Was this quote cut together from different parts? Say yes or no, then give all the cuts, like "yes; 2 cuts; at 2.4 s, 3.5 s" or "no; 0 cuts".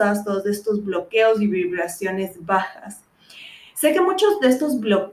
no; 0 cuts